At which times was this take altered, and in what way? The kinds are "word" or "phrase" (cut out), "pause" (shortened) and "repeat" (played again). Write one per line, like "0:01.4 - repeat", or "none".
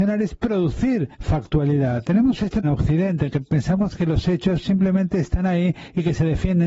0:01.1 - pause
0:02.6 - word

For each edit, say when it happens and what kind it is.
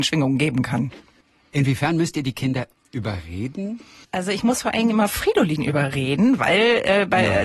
none

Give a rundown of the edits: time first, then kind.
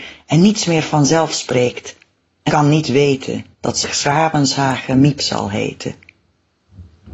0:02.5 - word
0:03.5 - pause
0:03.8 - word

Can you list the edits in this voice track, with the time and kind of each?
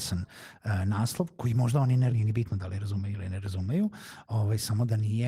0:02.1 - word

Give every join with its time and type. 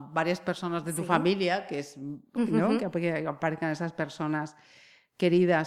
0:02.4 - word

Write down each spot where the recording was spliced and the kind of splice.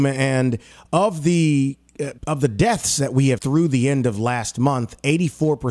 0:02.2 - pause
0:03.4 - word

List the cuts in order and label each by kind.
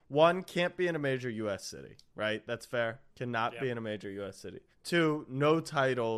0:03.1 - pause
0:04.7 - pause

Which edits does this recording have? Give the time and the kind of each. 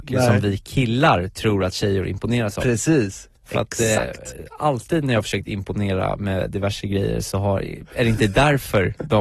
0:03.4 - pause

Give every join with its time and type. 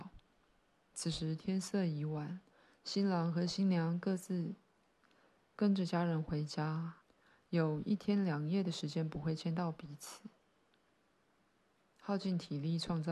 none

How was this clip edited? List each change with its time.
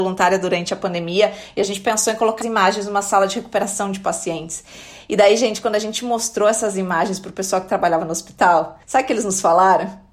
0:02.4 - word
0:08.8 - pause

